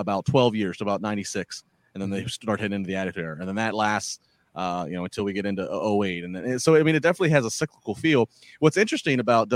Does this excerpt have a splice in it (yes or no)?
no